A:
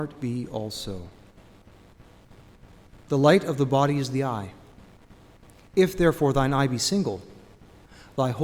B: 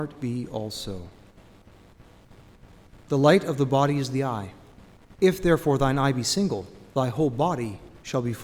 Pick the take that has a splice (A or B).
B